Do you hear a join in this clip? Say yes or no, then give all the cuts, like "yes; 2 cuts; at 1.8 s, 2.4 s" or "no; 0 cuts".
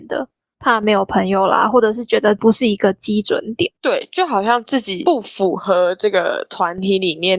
yes; 1 cut; at 3.8 s